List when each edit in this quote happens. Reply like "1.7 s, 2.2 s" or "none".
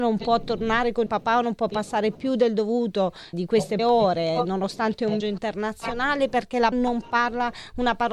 1.1 s, 3.3 s, 3.8 s, 5.2 s, 6.7 s